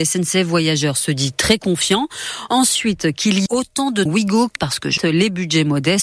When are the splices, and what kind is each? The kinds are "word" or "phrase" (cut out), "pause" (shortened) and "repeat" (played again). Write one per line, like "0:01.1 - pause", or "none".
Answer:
0:03.5 - word
0:04.1 - word
0:04.6 - word
0:05.0 - word